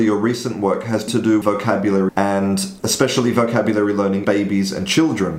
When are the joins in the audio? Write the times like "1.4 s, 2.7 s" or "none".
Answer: 1.1 s, 1.4 s, 2.1 s, 2.8 s, 4.2 s